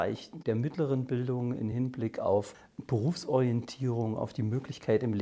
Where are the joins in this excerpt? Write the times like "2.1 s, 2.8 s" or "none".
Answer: none

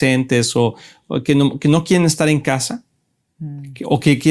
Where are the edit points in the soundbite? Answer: none

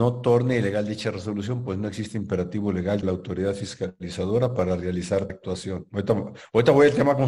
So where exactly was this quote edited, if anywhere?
3.0 s, 5.3 s

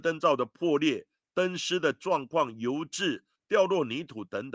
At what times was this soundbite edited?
none

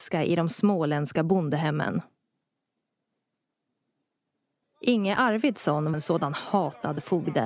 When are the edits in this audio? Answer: 5.9 s

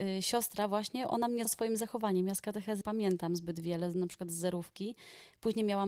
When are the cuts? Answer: 1.4 s, 2.8 s

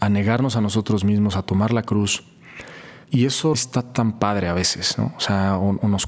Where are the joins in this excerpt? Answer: 3.0 s, 3.5 s

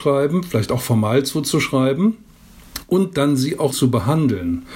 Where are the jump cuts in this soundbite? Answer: 3.7 s

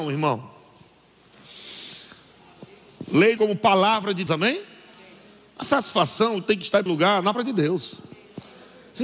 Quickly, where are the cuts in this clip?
3.4 s, 4.3 s, 5.6 s, 6.9 s, 7.3 s

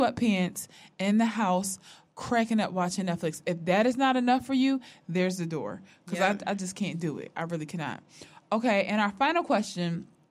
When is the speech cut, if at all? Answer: none

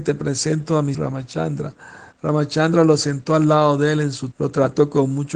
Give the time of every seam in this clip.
0.9 s, 4.3 s

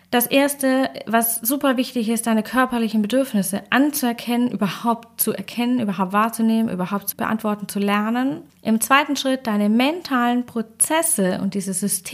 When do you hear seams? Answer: 7.1 s, 8.5 s

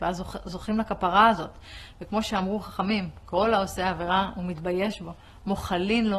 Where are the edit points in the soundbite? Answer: none

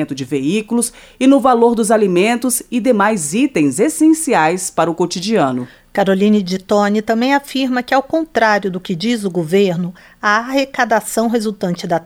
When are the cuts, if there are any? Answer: none

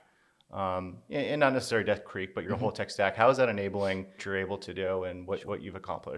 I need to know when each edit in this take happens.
2.4 s, 4.2 s

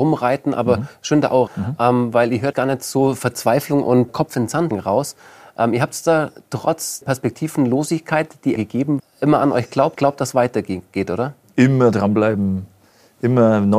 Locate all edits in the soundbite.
1.5 s, 2.5 s, 4.1 s, 4.7 s, 7.0 s, 8.6 s, 9.0 s, 10.0 s

